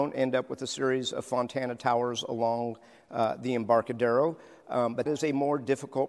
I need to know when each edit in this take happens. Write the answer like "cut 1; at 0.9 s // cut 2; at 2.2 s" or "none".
cut 1; at 5.1 s